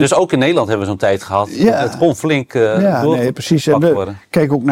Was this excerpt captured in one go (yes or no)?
yes